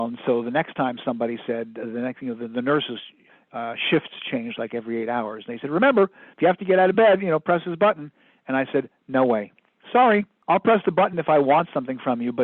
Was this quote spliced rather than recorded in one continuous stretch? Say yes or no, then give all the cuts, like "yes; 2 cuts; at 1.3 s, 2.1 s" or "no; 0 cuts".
no; 0 cuts